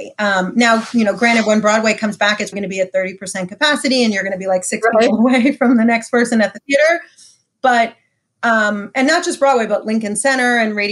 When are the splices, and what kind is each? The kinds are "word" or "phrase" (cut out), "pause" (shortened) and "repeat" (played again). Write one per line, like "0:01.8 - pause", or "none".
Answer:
0:02.5 - word